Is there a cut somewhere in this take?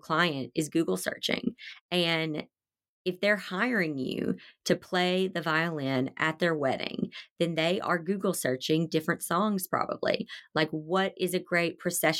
no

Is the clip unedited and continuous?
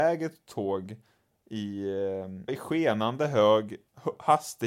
no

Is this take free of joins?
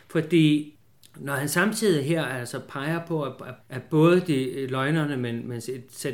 no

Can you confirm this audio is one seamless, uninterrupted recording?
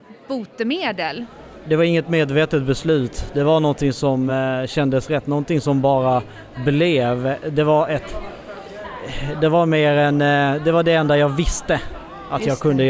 yes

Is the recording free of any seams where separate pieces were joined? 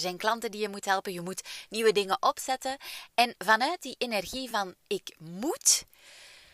yes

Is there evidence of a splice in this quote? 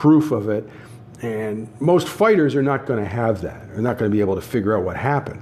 no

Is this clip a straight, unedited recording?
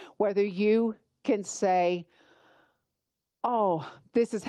yes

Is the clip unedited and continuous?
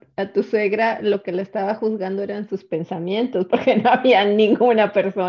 yes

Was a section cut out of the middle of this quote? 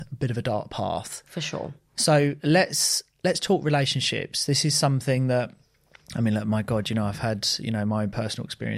no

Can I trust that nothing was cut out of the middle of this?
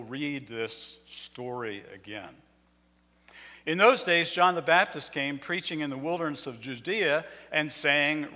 yes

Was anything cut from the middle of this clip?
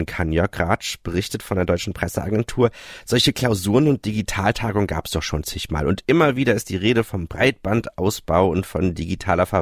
no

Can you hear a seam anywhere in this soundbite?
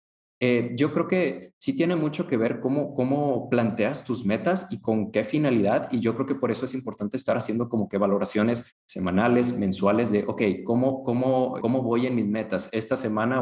yes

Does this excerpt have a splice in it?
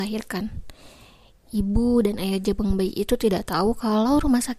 no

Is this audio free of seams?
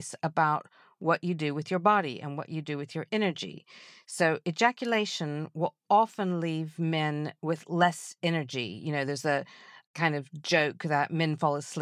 yes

